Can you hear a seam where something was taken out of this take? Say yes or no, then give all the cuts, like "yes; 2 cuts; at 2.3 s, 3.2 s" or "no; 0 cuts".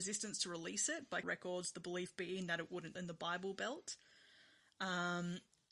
yes; 2 cuts; at 1.2 s, 2.9 s